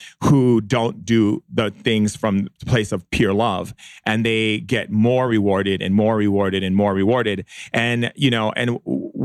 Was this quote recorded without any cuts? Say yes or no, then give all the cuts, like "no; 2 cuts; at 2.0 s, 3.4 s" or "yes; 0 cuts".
yes; 0 cuts